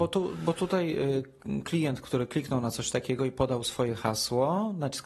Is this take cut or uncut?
uncut